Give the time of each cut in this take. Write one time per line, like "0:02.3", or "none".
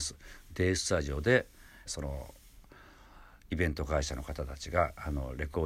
0:01.9